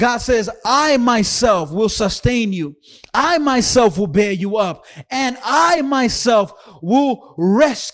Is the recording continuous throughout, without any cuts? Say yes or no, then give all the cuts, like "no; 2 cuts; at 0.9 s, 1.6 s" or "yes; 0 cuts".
yes; 0 cuts